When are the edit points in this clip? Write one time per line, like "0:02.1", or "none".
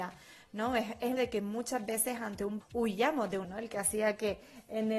0:01.2
0:02.6
0:03.4